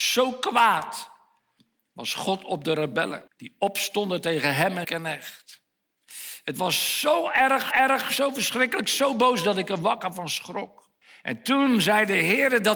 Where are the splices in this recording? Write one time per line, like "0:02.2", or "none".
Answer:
0:03.3
0:04.8
0:07.7
0:11.0

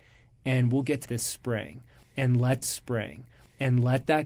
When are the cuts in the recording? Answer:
0:01.0
0:02.6

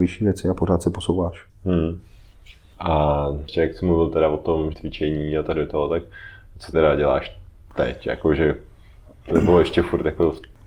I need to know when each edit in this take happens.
0:01.5
0:04.7
0:06.7

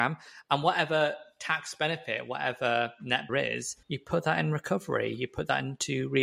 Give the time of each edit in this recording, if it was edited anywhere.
0:03.3
0:03.8

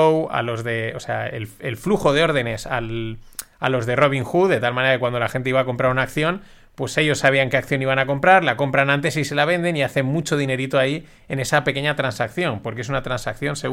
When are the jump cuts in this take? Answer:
none

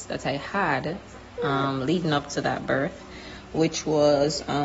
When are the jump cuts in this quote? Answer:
none

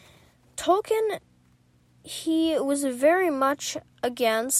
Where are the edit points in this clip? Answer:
none

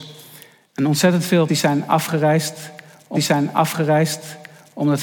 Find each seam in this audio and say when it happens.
0:01.5
0:03.2

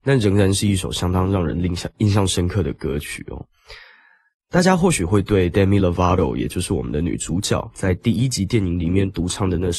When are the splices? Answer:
none

